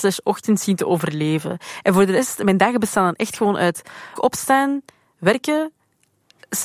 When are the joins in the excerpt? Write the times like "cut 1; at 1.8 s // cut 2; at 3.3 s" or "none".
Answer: cut 1; at 4.2 s